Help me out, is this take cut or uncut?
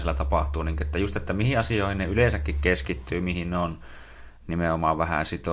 uncut